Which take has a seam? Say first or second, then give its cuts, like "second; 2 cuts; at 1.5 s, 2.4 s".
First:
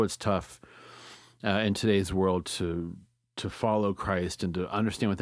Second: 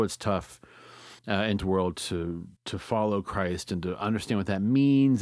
second; 3 cuts; at 1.2 s, 1.6 s, 2.6 s